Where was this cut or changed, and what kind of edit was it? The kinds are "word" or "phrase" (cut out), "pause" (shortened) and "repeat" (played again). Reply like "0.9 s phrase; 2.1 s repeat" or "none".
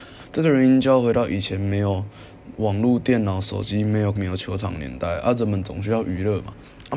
4.2 s word